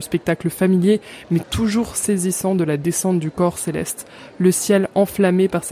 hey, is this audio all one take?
yes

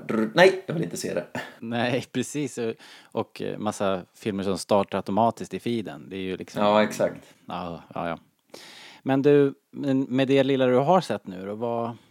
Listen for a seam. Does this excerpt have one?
yes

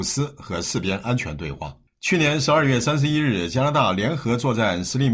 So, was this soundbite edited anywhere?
no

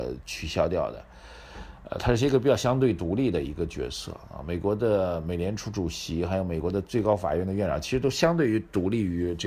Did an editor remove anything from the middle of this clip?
no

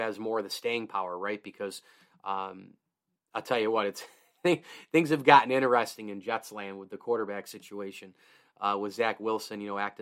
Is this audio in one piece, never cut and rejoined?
yes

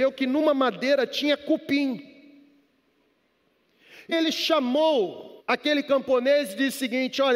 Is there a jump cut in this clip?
yes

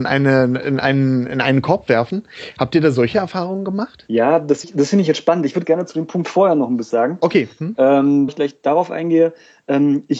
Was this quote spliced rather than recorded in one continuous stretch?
yes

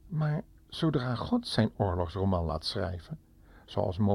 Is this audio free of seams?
yes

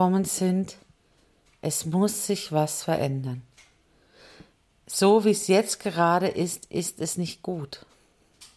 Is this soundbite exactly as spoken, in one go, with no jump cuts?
yes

